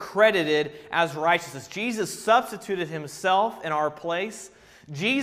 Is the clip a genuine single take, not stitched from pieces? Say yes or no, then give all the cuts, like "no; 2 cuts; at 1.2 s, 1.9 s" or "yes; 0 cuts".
yes; 0 cuts